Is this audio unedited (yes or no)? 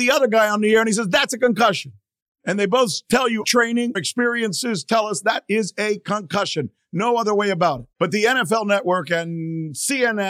no